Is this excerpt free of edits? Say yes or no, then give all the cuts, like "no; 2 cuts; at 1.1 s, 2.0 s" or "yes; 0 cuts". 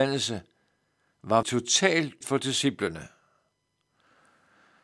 no; 2 cuts; at 1.4 s, 2.2 s